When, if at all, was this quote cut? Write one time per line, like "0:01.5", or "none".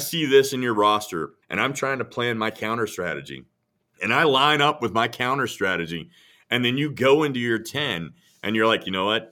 0:01.4
0:03.7